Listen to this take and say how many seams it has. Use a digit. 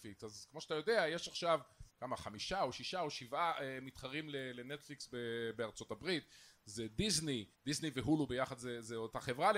2